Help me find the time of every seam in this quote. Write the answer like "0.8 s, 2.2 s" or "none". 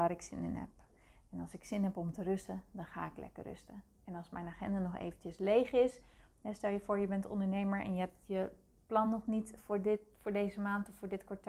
none